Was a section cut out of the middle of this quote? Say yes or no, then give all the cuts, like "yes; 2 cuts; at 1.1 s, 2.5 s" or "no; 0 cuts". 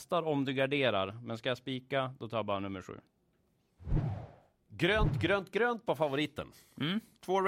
no; 0 cuts